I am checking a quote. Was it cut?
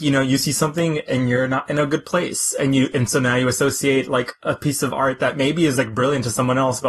no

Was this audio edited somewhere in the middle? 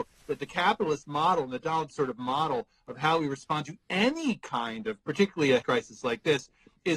yes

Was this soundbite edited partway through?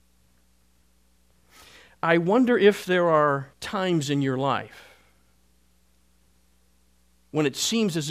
yes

